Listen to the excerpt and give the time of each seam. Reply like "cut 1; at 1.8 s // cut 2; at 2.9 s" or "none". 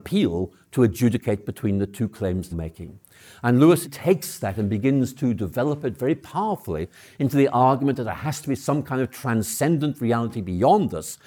cut 1; at 2.5 s // cut 2; at 3.8 s